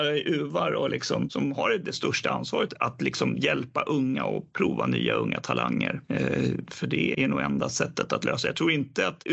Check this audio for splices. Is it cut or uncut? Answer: cut